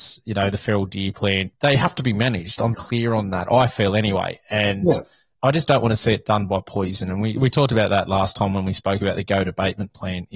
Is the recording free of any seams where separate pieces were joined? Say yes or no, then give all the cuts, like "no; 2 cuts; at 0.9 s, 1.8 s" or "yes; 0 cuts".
no; 1 cut; at 2.7 s